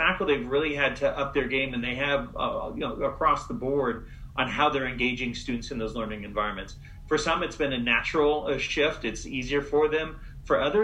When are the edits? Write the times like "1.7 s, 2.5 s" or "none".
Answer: none